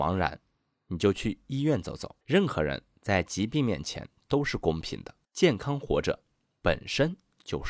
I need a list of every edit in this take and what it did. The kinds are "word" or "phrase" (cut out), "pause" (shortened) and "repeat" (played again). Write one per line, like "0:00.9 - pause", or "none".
0:02.2 - pause
0:05.2 - pause

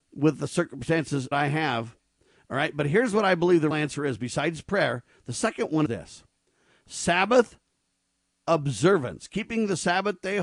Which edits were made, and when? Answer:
0:01.3 - word
0:03.7 - word
0:05.9 - word

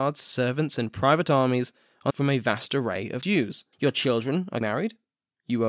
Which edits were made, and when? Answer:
0:02.1 - phrase
0:03.2 - word
0:03.7 - pause
0:04.6 - word

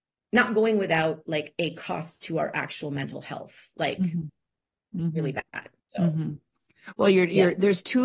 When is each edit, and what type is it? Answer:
0:05.8 - pause

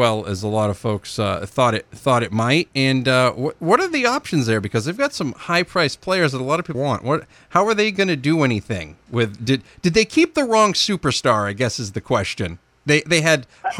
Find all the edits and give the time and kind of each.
0:06.7 - phrase

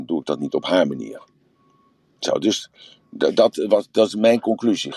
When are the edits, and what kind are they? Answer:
none

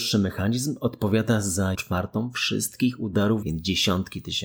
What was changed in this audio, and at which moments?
0:01.7 - word
0:03.4 - word

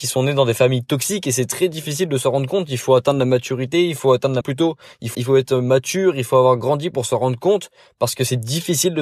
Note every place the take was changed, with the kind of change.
0:04.4 - word
0:05.1 - word

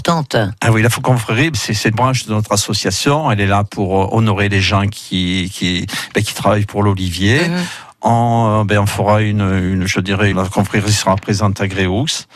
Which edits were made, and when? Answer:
0:01.5 - word
0:01.9 - word
0:10.3 - word

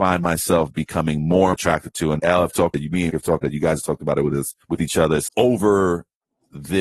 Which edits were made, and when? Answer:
0:01.5 - phrase
0:02.2 - word
0:02.7 - word
0:03.1 - phrase
0:03.4 - word
0:04.6 - pause
0:05.3 - phrase

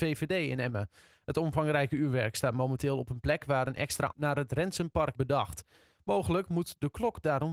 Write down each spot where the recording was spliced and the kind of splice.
0:04.1 - word
0:05.1 - word

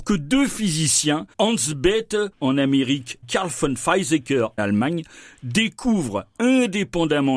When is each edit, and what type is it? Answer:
0:01.3 - pause
0:02.3 - pause
0:03.2 - word
0:04.6 - word
0:06.3 - pause

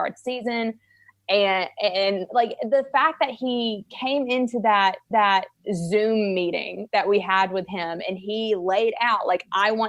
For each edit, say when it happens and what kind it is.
0:05.1 - repeat

